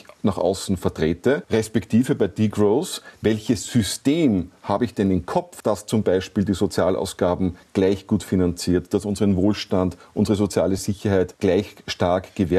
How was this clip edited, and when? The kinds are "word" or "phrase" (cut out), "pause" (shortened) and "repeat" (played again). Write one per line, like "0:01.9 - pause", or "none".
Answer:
none